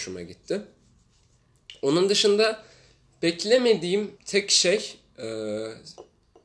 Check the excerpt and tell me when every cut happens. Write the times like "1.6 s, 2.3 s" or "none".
4.2 s